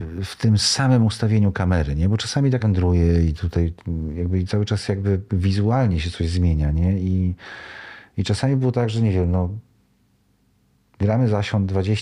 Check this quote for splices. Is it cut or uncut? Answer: cut